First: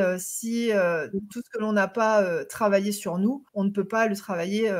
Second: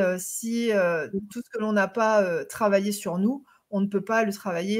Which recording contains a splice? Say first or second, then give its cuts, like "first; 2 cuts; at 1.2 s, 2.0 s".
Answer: first; 1 cut; at 3.5 s